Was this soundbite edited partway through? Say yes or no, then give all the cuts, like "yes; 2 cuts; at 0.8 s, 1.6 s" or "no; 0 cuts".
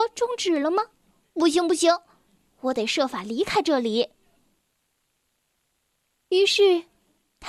no; 0 cuts